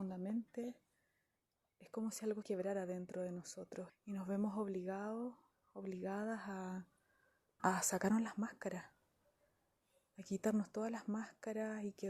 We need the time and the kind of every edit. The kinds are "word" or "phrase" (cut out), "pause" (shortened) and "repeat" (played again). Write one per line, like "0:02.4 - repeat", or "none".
0:02.4 - word
0:03.9 - word
0:07.6 - word